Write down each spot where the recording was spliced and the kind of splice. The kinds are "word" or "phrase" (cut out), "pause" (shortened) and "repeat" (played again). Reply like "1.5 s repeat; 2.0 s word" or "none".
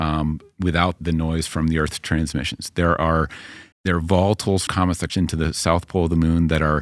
1.0 s word; 3.7 s word; 4.7 s word; 5.1 s word

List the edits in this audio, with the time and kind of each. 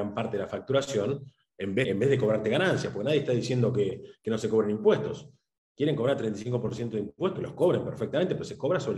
1.8 s word; 7.3 s word

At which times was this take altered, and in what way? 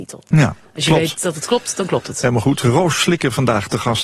none

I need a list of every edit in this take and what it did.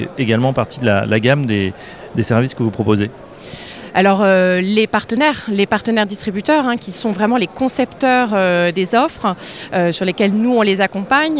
none

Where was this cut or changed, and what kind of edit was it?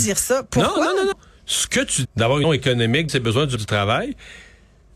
1.1 s word; 2.0 s word; 2.4 s word; 3.1 s word; 3.6 s word

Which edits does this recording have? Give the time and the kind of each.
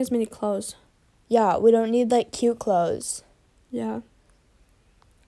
none

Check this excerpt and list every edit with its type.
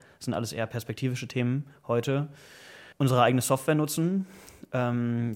2.9 s pause

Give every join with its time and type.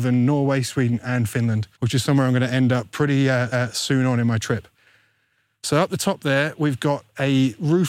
1.7 s pause; 3.5 s repeat

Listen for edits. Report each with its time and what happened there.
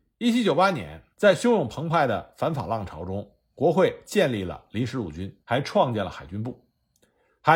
1.1 s pause; 5.4 s pause

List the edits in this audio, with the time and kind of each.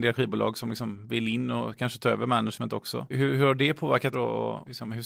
4.1 s word

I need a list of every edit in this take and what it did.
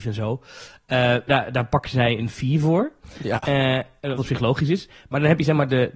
1.3 s word; 4.2 s word

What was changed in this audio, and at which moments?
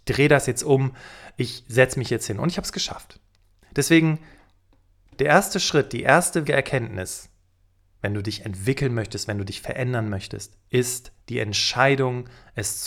6.5 s word; 11.2 s word

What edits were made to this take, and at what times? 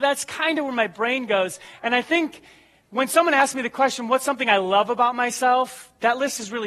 none

